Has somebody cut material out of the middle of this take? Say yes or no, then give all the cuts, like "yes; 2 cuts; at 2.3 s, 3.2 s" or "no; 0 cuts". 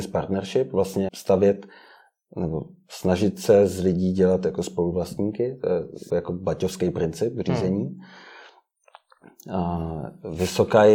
yes; 2 cuts; at 1.1 s, 6.1 s